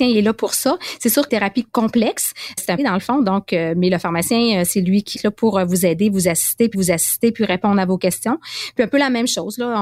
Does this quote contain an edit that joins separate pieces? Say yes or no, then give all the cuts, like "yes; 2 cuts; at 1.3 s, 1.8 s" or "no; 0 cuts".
yes; 5 cuts; at 1.3 s, 1.6 s, 2.8 s, 5.1 s, 6.7 s